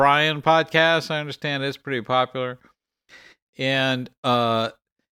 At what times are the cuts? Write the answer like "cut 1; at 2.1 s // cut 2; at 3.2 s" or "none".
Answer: none